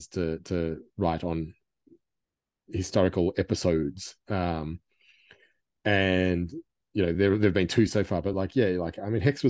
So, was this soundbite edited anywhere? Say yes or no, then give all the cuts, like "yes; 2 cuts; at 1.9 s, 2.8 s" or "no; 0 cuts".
no; 0 cuts